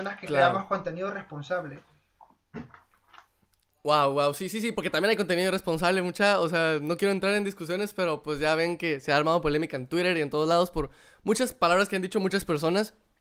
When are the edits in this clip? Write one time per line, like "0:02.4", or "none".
none